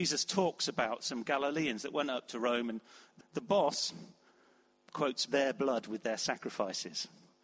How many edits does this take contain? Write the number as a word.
two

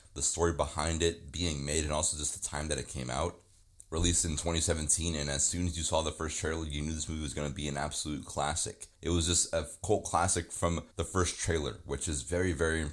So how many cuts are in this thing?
two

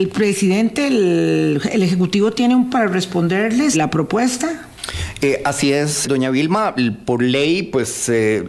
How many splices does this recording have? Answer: three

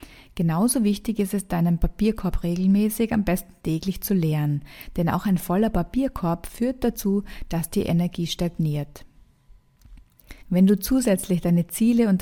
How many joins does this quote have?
one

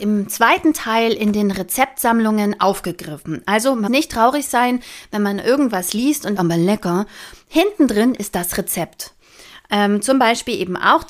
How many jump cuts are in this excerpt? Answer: two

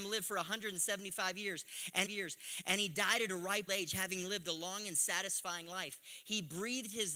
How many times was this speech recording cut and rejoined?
two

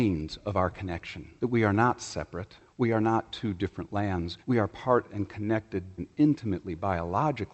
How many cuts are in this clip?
four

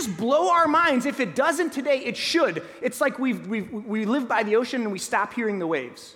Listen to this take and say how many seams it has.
zero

